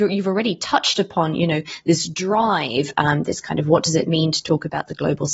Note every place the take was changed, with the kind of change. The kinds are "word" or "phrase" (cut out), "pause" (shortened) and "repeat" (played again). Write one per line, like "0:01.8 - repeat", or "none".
none